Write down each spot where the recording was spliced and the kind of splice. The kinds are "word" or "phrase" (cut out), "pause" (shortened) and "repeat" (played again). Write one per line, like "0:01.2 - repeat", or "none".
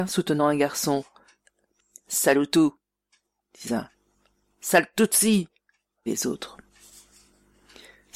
0:03.7 - word
0:06.1 - word

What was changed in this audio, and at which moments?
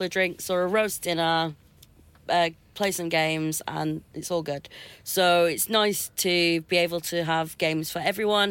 none

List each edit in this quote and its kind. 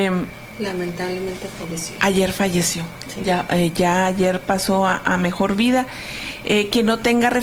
none

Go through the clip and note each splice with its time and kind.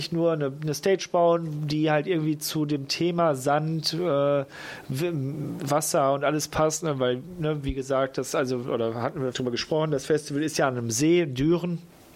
0:09.3 - phrase

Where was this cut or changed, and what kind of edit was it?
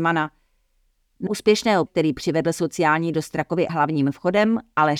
0:01.3 - word
0:01.9 - word
0:03.1 - word
0:03.7 - word

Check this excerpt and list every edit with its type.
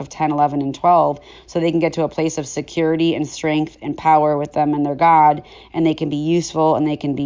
none

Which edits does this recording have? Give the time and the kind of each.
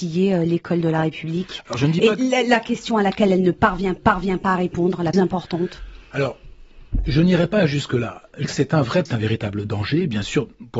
0:04.0 - repeat
0:05.1 - word
0:06.0 - pause
0:08.4 - word
0:09.1 - phrase

